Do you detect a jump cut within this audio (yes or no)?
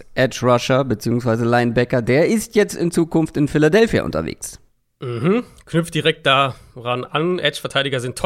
no